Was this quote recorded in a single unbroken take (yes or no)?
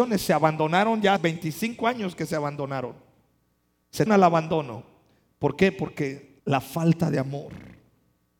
no